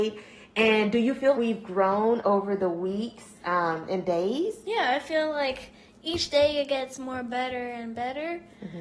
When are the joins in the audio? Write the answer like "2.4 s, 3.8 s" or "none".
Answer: 1.3 s